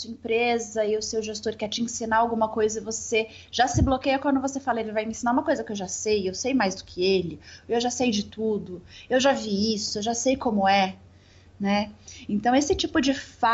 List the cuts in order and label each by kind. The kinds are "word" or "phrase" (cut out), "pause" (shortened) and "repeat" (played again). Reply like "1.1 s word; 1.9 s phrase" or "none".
none

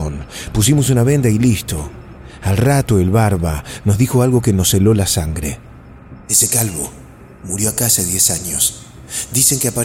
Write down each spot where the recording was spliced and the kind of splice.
6.2 s pause

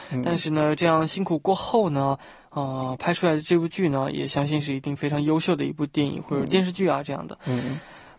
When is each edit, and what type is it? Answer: none

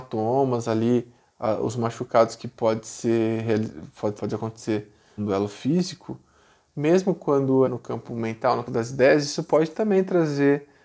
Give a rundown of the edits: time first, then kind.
4.2 s word; 5.2 s word; 7.6 s word; 8.7 s word

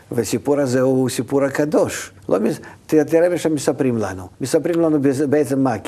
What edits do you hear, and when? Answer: 2.2 s pause; 4.3 s pause

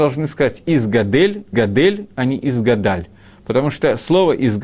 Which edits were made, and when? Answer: 1.5 s repeat

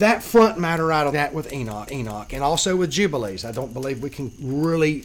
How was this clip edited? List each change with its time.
1.1 s phrase; 1.9 s repeat

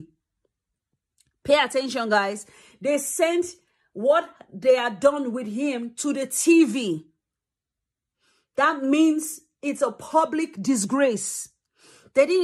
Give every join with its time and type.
none

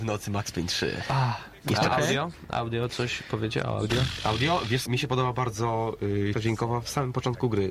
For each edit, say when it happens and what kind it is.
4.9 s word; 6.3 s word

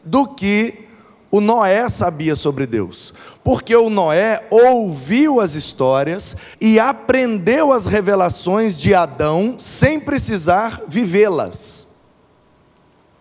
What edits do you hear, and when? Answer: 6.5 s pause

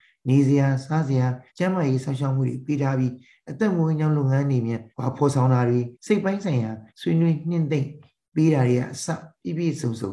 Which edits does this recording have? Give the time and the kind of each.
1.5 s pause; 4.9 s pause; 5.9 s pause; 6.9 s pause

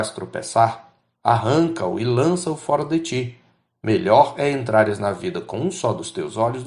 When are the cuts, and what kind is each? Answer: none

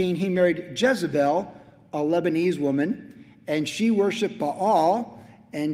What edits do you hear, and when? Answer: none

